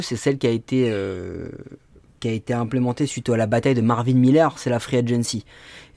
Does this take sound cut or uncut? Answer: uncut